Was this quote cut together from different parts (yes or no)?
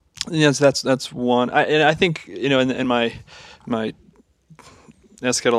no